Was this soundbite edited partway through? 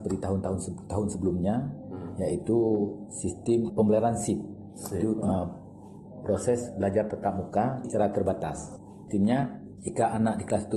yes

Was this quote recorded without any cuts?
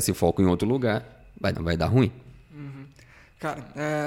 no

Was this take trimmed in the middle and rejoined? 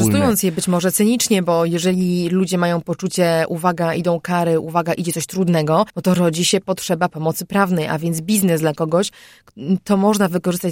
yes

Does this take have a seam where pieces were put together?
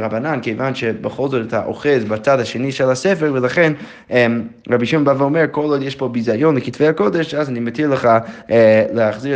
no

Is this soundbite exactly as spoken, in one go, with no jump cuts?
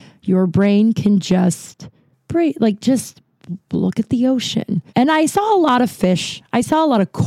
no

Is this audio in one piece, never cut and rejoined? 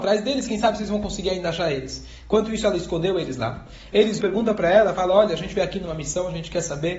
no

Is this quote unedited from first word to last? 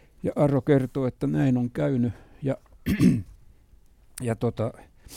yes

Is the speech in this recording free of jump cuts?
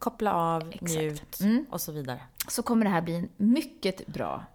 yes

